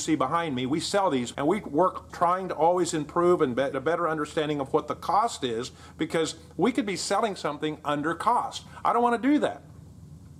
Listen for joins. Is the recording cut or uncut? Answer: cut